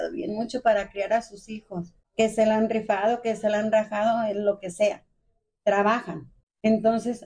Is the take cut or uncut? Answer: uncut